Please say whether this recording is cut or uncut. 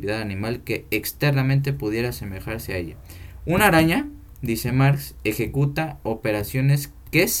uncut